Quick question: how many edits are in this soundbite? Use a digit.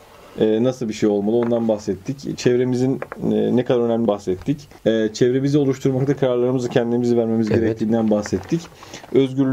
3